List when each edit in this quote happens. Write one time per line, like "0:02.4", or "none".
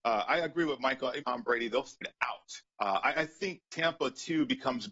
0:01.2
0:02.0
0:02.7
0:03.6